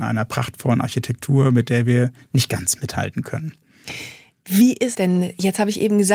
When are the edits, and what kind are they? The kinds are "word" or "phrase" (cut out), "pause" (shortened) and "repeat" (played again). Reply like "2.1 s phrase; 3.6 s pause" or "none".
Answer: 4.9 s word

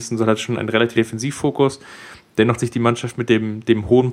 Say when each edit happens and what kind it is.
0.9 s word; 2.6 s word

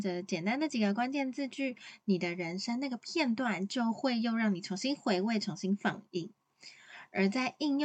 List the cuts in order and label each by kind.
none

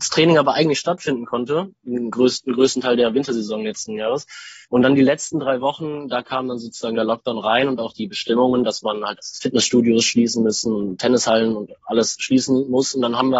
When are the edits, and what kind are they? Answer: 4.6 s pause

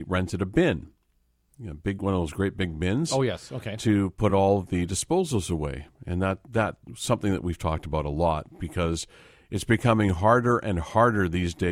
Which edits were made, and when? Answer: none

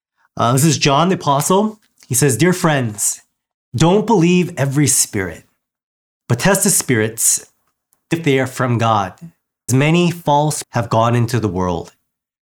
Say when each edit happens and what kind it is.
8.1 s word; 9.7 s word; 10.6 s word

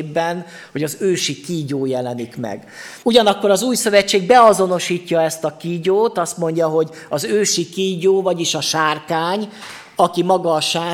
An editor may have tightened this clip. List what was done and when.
3.0 s pause

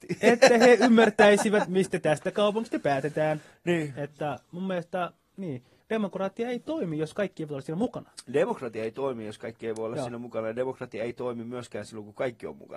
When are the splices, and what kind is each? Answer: 5.8 s pause

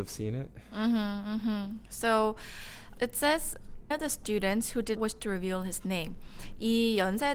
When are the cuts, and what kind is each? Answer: 2.9 s word; 3.9 s word; 5.0 s word

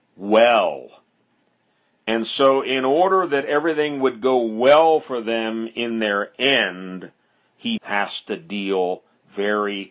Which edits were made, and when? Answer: 7.8 s word

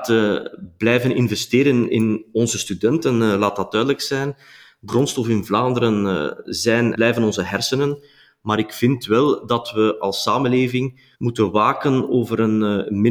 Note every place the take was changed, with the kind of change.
4.9 s word; 6.9 s word; 11.1 s pause

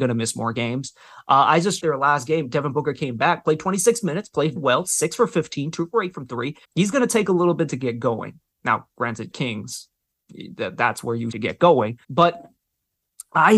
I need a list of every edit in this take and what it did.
1.8 s word; 4.6 s word; 6.6 s pause; 9.3 s phrase; 11.3 s word; 12.0 s pause

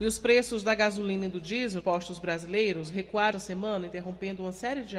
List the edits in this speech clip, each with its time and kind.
1.8 s word; 3.3 s word

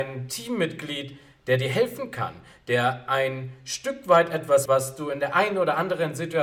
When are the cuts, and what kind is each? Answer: 4.7 s word

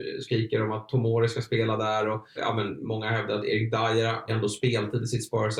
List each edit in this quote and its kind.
2.4 s word; 4.3 s word

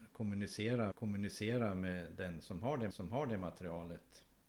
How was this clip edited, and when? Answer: 0.9 s repeat; 2.9 s repeat

